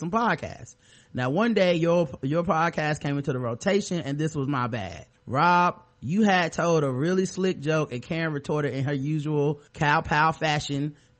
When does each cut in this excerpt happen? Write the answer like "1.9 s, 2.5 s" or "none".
5.2 s, 9.7 s